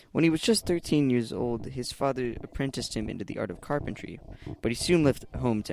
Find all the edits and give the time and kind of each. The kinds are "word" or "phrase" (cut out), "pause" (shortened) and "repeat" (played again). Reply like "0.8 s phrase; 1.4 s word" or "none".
none